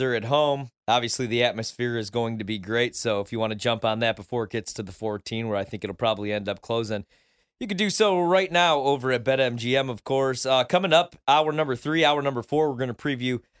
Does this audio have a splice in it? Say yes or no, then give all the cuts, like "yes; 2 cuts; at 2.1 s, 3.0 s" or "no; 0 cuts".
no; 0 cuts